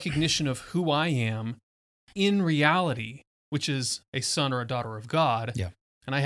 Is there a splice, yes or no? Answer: no